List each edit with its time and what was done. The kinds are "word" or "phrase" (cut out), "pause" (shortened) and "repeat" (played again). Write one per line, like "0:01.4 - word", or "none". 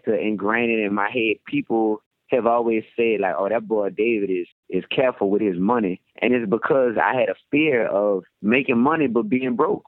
0:06.1 - pause
0:08.3 - pause